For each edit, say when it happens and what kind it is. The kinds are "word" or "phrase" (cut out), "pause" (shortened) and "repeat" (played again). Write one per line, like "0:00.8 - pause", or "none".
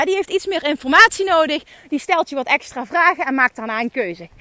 none

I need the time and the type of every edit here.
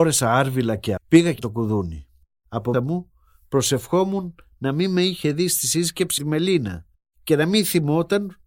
0:01.0 - word
0:01.4 - word
0:02.7 - word
0:06.2 - word

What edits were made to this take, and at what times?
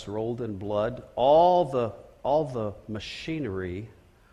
none

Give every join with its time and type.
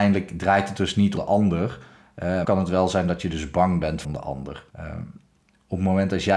0:01.2 - word
0:02.4 - word
0:04.0 - phrase
0:04.7 - pause

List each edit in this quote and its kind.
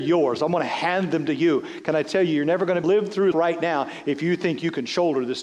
0:02.8 - word
0:03.3 - word

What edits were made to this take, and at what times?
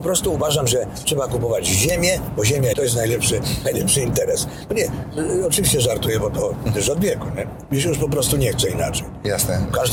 0:02.7 - phrase
0:06.7 - word

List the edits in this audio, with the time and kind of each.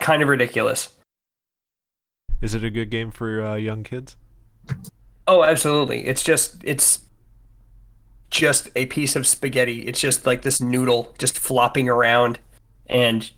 none

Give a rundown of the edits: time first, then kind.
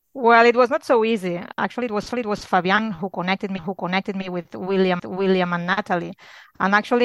0:02.1 - repeat
0:03.6 - repeat
0:05.0 - repeat

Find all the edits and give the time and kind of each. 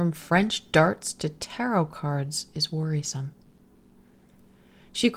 none

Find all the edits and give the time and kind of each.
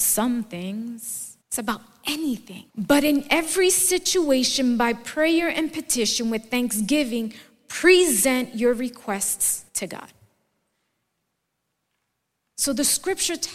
0:01.4 - pause
0:02.7 - pause
0:09.7 - pause

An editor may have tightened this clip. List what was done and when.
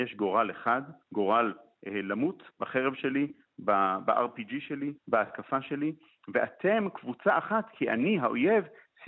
0:01.0 - pause
0:02.5 - pause
0:05.0 - pause

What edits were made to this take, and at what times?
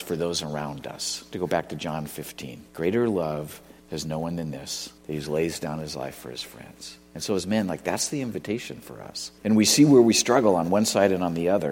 0:02.7 - pause
0:03.8 - pause
0:05.0 - pause
0:09.4 - pause

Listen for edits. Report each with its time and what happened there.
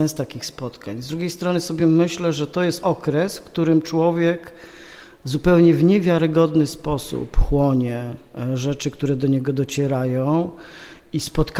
none

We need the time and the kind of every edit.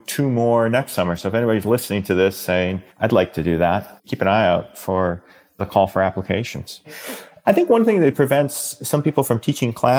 0:02.9 - pause

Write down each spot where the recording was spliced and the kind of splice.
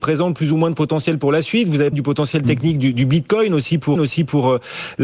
0:01.9 - word
0:04.0 - repeat

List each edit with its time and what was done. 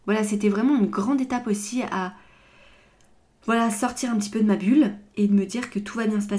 none

